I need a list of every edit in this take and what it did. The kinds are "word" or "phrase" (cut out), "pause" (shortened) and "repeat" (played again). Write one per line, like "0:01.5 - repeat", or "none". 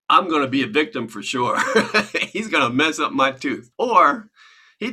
0:03.7 - pause